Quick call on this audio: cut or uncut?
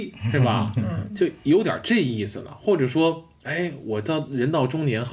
uncut